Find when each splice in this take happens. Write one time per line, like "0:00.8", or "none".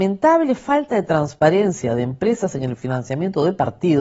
none